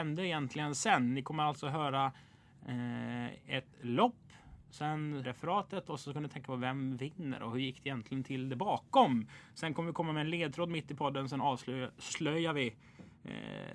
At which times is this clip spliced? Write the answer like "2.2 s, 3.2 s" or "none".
3.7 s, 5.2 s